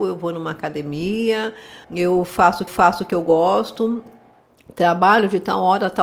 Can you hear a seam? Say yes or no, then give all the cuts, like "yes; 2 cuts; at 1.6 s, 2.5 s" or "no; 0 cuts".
yes; 2 cuts; at 1.8 s, 2.7 s